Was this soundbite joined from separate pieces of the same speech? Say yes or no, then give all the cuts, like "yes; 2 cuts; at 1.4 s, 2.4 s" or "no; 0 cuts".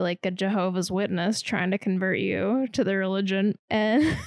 no; 0 cuts